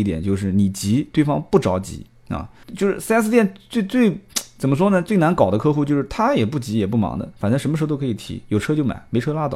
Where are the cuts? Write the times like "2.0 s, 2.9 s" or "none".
2.6 s